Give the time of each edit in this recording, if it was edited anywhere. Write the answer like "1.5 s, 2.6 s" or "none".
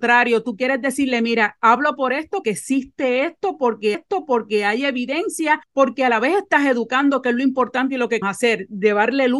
2.4 s, 3.9 s, 5.6 s, 8.2 s